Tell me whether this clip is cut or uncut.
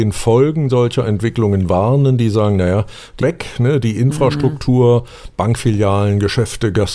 cut